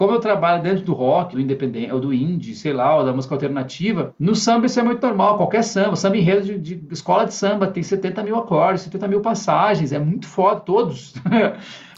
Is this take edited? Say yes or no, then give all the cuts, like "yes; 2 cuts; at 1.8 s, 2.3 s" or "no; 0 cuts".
yes; 1 cut; at 1.3 s